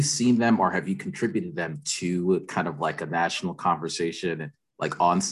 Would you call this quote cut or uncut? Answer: uncut